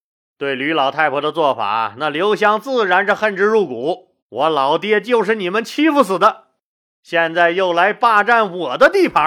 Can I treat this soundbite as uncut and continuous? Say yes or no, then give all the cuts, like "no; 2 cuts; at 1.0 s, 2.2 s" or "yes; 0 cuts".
no; 1 cut; at 4.2 s